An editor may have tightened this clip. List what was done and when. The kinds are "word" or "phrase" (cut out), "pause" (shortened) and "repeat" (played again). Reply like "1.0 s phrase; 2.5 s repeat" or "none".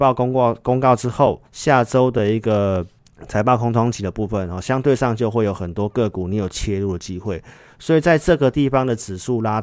1.5 s pause; 3.0 s pause